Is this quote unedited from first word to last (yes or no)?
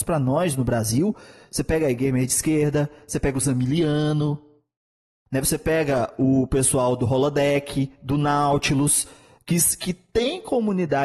yes